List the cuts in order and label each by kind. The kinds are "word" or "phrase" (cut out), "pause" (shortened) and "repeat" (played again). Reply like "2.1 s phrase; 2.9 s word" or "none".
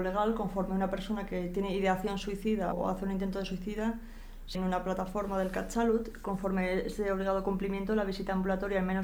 2.7 s word; 4.5 s word